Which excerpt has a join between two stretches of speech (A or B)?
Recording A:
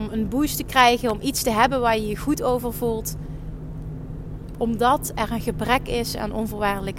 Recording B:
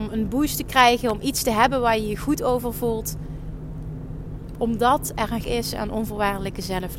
B